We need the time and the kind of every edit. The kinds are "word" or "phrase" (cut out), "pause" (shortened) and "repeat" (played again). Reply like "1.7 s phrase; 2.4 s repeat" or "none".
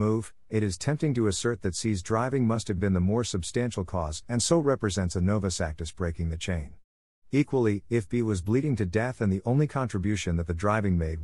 none

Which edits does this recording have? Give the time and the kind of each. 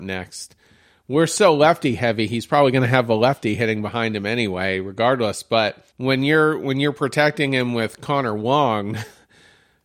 5.9 s pause

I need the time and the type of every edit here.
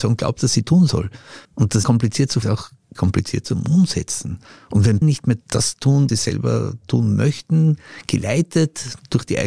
1.4 s pause; 1.8 s phrase; 2.4 s phrase; 2.9 s word; 4.4 s pause; 5.0 s word; 6.1 s word

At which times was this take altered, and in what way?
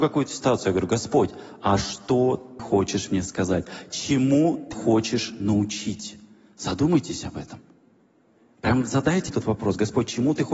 2.6 s word; 4.7 s word; 9.3 s word

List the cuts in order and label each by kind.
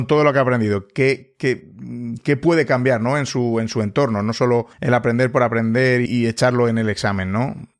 4.7 s pause; 6.1 s word

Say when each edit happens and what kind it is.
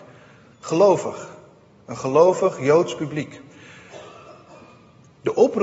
none

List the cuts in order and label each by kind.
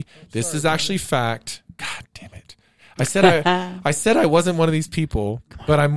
none

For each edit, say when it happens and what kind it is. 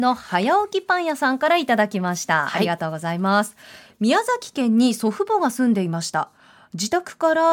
none

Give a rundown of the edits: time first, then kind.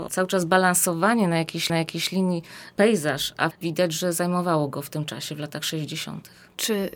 1.7 s repeat; 3.5 s word

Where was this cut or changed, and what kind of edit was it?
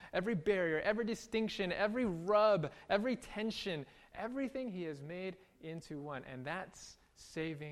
none

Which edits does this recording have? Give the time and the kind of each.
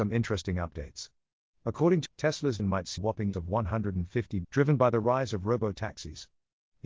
2.1 s word; 2.6 s word; 3.0 s word; 3.3 s word; 4.4 s word

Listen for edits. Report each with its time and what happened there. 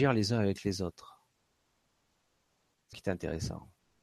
2.9 s word

